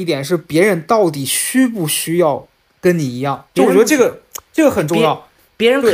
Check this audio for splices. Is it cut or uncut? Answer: cut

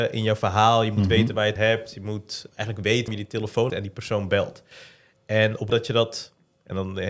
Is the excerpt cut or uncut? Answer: cut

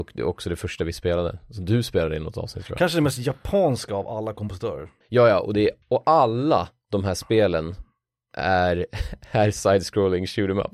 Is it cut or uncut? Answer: cut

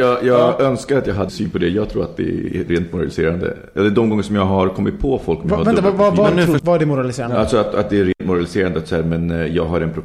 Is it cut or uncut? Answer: cut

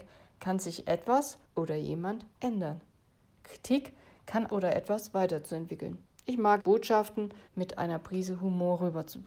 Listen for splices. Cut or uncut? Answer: cut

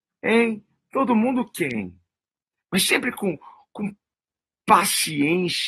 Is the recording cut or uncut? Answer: uncut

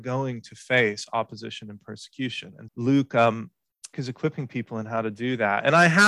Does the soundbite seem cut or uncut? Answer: cut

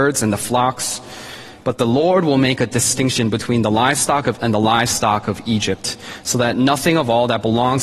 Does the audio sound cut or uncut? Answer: cut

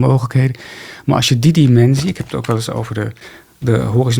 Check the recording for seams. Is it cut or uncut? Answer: uncut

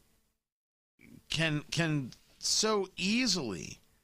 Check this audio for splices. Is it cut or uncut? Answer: uncut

